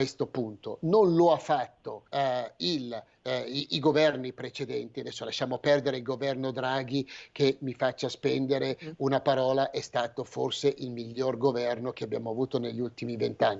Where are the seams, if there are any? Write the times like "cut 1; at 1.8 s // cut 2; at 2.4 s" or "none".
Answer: cut 1; at 2.1 s